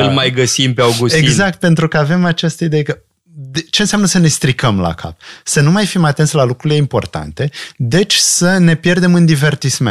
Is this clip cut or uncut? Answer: uncut